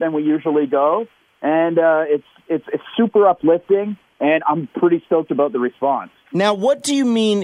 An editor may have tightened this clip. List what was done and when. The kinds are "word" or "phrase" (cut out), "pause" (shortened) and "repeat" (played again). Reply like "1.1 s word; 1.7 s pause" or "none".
none